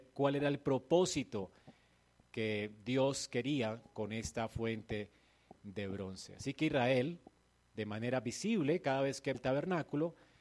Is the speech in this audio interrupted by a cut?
yes; 1 cut; at 9.3 s

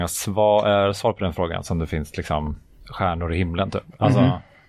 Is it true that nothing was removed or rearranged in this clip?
yes; 0 cuts

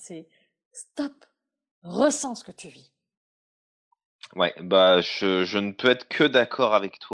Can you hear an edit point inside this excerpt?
no; 0 cuts

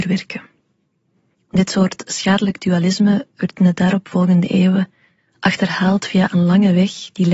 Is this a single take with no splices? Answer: yes; 0 cuts

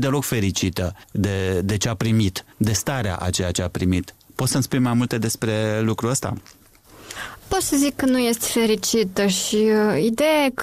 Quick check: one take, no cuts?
no; 2 cuts; at 1.0 s, 2.5 s

